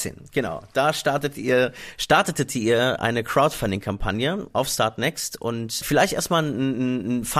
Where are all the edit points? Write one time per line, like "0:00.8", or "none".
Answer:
0:04.5
0:05.8